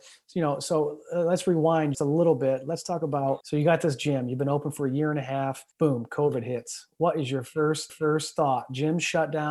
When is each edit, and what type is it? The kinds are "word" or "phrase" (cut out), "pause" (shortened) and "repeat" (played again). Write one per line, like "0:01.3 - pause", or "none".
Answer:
0:01.9 - word
0:03.4 - word
0:05.7 - pause
0:07.9 - repeat

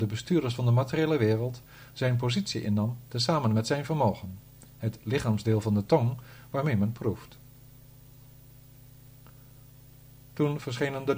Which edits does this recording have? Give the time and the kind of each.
none

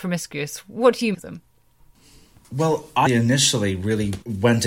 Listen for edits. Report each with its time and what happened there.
0:01.1 - word
0:03.1 - word

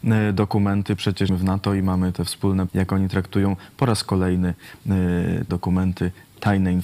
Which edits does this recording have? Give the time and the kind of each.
0:01.3 - word
0:02.7 - word
0:05.5 - word

